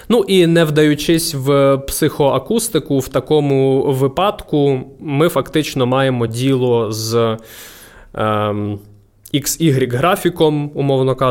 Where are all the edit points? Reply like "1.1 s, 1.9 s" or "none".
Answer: none